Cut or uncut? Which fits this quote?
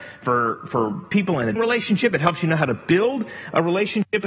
cut